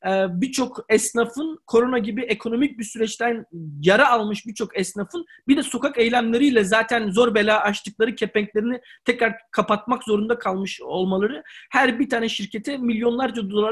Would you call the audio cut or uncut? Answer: uncut